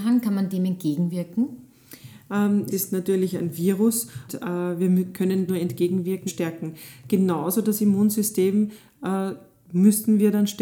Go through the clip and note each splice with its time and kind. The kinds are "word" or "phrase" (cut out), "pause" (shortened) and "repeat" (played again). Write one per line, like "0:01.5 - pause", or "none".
0:02.7 - word
0:04.3 - word
0:05.5 - word
0:06.3 - phrase